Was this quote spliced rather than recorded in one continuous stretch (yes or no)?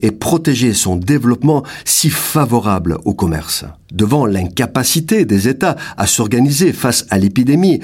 yes